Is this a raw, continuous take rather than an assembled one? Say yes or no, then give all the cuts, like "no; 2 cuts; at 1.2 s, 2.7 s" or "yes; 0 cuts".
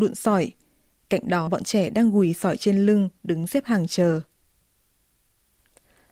no; 1 cut; at 1.5 s